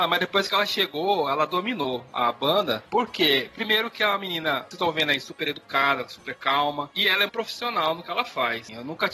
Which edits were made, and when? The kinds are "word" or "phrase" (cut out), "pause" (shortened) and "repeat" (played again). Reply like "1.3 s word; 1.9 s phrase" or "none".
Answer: 7.3 s word

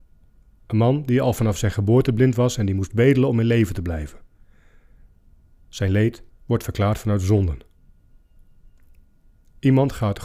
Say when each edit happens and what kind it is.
6.3 s pause

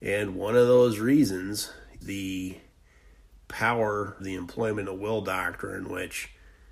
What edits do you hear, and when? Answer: 2.0 s word; 4.2 s word

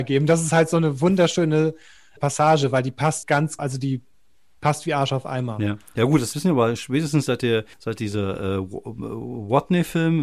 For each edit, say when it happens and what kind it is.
2.2 s word; 3.2 s word; 3.6 s word; 6.3 s word; 7.7 s pause

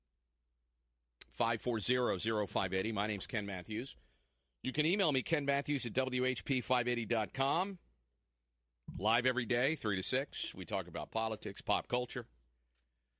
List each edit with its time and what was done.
11.1 s word

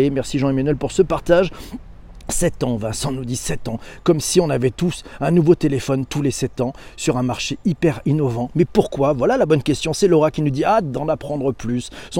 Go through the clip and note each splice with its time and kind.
none

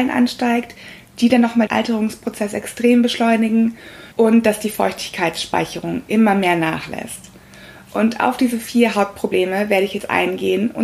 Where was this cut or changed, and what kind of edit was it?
1.7 s word; 4.1 s pause

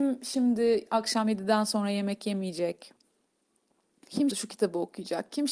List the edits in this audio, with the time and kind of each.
4.3 s word

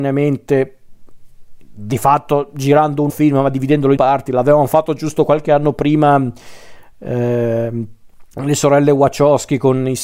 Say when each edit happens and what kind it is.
3.1 s word; 4.0 s word; 8.3 s pause

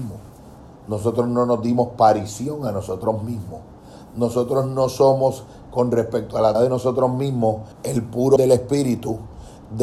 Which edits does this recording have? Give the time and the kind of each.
6.5 s word; 7.7 s pause; 8.4 s word

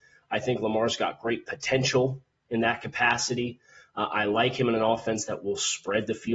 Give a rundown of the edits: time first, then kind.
none

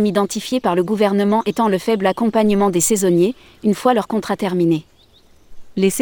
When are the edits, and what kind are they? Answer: none

